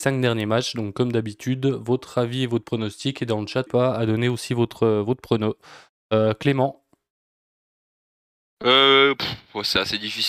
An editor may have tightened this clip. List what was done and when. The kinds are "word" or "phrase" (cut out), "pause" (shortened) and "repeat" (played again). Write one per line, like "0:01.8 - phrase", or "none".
0:03.7 - word